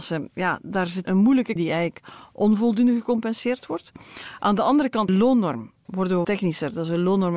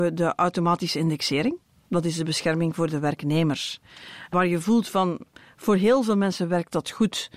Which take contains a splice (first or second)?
first